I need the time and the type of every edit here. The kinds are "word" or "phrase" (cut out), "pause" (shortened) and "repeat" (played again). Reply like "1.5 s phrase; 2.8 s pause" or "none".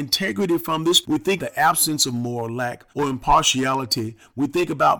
1.0 s word; 1.4 s word; 2.9 s pause